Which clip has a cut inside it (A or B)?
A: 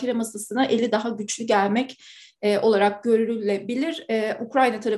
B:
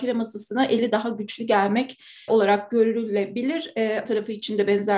B